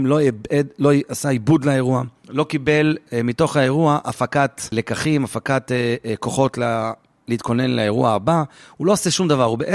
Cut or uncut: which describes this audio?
uncut